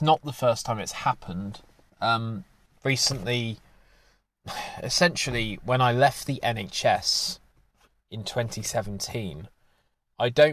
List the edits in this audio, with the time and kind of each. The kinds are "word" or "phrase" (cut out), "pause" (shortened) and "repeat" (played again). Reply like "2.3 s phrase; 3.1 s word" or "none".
none